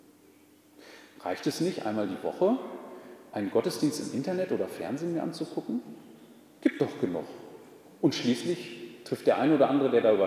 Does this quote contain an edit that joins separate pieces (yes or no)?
no